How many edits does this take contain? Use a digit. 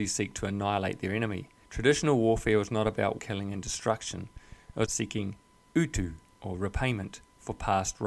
4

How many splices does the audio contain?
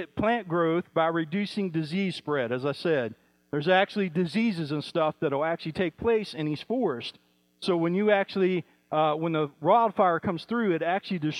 0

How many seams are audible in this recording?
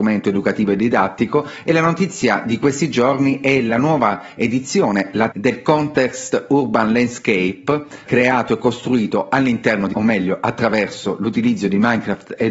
3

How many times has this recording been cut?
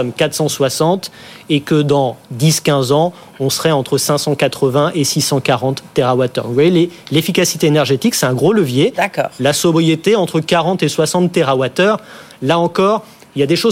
0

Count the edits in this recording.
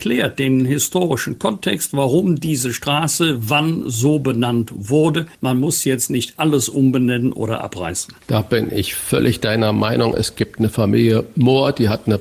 0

